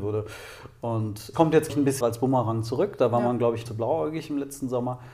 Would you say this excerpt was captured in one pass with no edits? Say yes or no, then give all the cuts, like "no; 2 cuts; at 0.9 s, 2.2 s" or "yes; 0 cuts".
no; 4 cuts; at 1.3 s, 1.7 s, 2.0 s, 3.7 s